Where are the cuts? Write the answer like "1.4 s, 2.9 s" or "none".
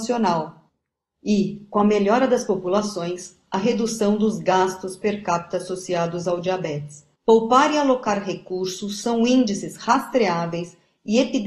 7.1 s